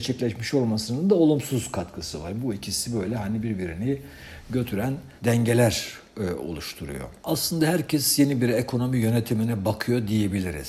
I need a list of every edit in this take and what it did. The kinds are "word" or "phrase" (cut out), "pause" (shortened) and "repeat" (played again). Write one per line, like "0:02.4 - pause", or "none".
0:05.2 - pause
0:07.2 - pause